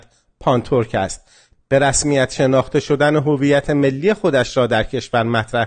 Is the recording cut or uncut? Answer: uncut